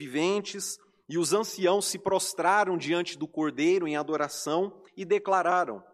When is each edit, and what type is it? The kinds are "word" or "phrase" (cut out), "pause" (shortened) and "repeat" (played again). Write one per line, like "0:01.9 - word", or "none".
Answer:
0:04.9 - pause